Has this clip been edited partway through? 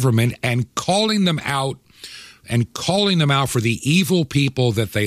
no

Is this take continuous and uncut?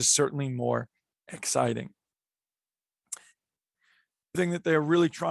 no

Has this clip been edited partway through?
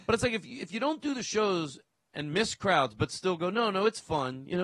no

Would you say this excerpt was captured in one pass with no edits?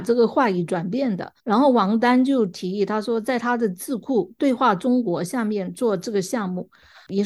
no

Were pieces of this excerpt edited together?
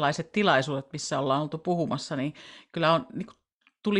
no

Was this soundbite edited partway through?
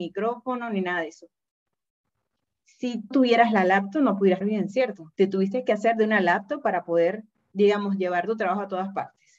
yes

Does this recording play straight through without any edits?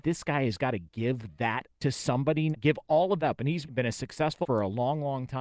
no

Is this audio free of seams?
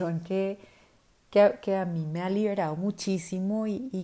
yes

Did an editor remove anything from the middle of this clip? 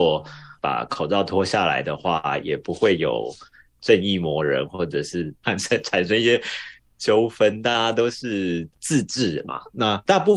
no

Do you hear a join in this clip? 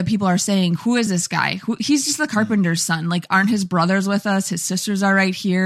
no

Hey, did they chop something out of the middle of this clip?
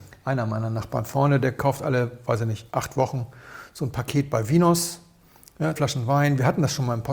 yes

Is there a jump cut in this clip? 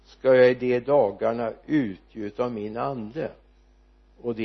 no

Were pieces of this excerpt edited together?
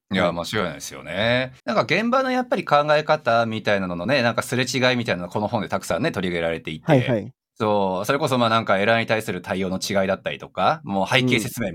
yes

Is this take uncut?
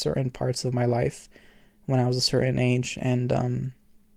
yes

